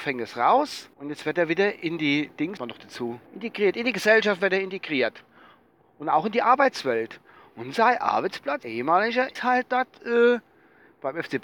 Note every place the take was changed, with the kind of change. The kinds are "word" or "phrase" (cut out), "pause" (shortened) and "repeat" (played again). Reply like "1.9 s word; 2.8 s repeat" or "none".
0.9 s pause; 2.6 s phrase; 3.3 s pause; 8.6 s word; 9.4 s word